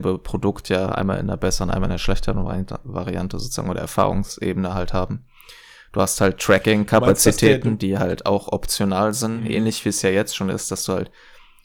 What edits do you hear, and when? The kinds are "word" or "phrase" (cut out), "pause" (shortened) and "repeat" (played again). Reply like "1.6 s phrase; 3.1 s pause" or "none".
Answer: none